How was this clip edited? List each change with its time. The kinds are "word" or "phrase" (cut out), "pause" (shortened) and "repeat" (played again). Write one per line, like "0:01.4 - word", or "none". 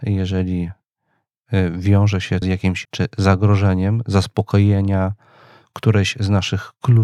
0:02.4 - word
0:02.8 - word